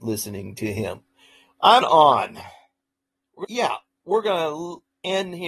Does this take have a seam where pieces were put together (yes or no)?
yes